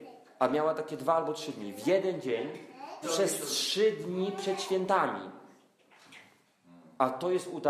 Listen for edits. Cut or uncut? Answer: cut